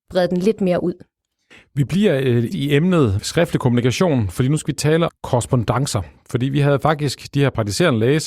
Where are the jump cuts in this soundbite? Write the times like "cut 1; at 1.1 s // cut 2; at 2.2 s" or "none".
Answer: cut 1; at 2.5 s // cut 2; at 3.2 s // cut 3; at 5.1 s

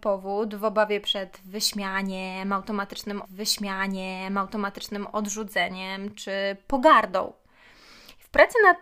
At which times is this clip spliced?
cut 1; at 3.2 s

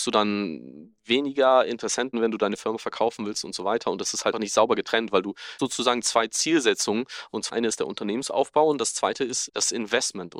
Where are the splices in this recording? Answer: cut 1; at 2.1 s // cut 2; at 4.3 s // cut 3; at 5.6 s // cut 4; at 7.5 s // cut 5; at 9.5 s

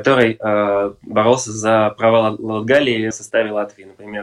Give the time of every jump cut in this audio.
cut 1; at 3.1 s

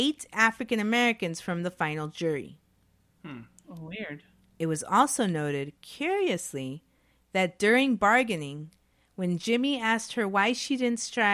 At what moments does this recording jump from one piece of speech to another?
none

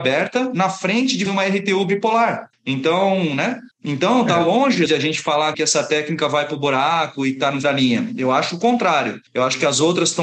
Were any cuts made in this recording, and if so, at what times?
cut 1; at 1.3 s // cut 2; at 2.5 s // cut 3; at 3.7 s // cut 4; at 4.9 s // cut 5; at 5.5 s // cut 6; at 7.6 s // cut 7; at 9.3 s

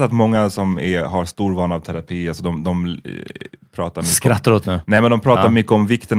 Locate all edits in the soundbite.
cut 1; at 4.6 s

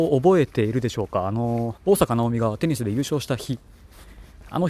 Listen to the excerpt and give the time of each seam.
cut 1; at 1.8 s

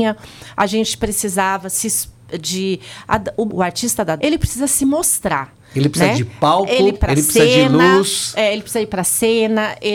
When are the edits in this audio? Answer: cut 1; at 3.5 s // cut 2; at 4.2 s // cut 3; at 6.9 s

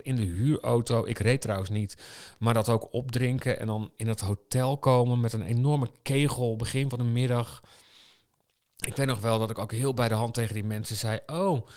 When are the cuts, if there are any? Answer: none

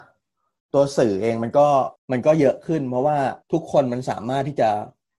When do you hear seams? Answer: cut 1; at 2.0 s // cut 2; at 3.4 s

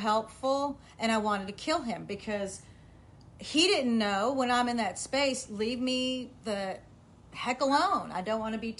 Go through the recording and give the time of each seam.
none

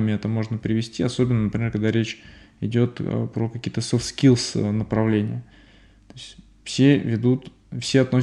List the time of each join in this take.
none

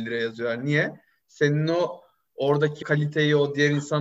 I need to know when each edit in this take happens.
cut 1; at 2.8 s

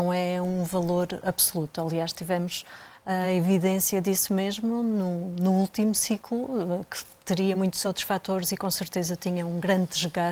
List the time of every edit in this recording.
none

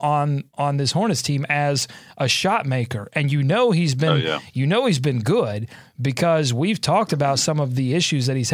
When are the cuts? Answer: none

